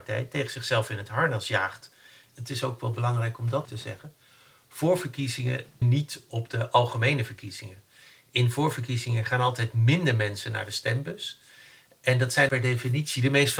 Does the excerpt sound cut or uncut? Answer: cut